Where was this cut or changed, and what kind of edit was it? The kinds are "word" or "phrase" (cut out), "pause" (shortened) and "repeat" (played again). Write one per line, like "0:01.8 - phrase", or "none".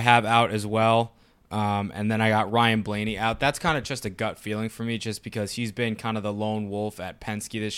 none